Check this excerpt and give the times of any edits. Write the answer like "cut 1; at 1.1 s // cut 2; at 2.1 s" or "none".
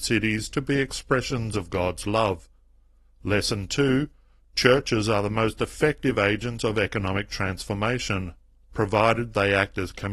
none